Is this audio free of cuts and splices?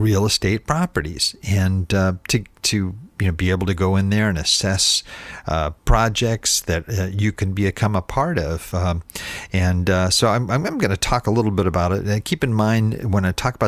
yes; 0 cuts

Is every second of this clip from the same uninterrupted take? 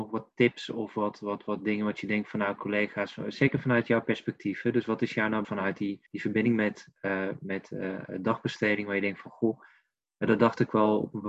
no; 2 cuts; at 5.4 s, 6.1 s

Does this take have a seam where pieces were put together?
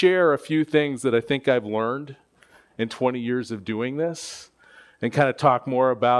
no; 0 cuts

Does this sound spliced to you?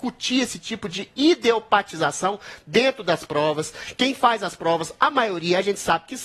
no; 0 cuts

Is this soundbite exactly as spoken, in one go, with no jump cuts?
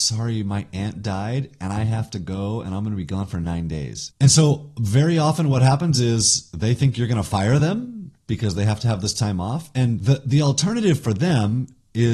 yes; 0 cuts

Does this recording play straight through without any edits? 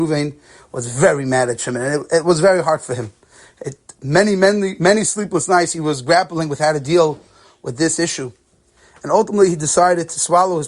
yes; 0 cuts

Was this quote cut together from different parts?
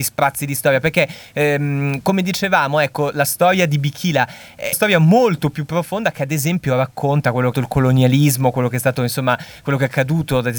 yes; 2 cuts; at 4.7 s, 7.5 s

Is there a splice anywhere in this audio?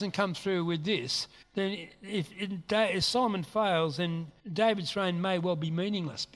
yes; 2 cuts; at 1.4 s, 4.4 s

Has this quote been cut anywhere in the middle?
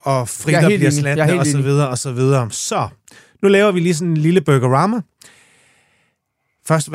no; 0 cuts

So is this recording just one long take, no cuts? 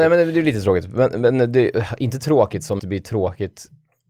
no; 1 cut; at 2.8 s

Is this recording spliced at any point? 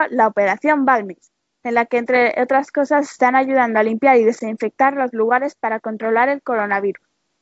no; 0 cuts

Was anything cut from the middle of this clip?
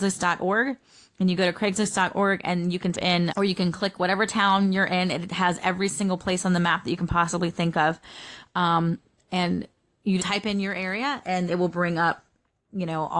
yes; 4 cuts; at 2.9 s, 3.3 s, 10.2 s, 11.5 s

